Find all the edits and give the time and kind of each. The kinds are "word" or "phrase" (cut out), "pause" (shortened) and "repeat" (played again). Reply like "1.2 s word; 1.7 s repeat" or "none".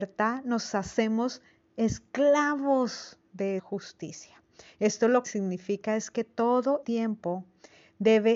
3.6 s word; 5.2 s word; 6.8 s word